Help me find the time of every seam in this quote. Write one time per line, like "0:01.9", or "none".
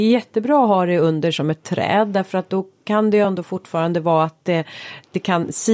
none